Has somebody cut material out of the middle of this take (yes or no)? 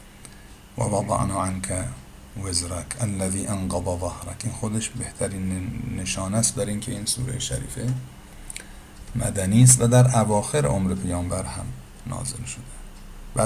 no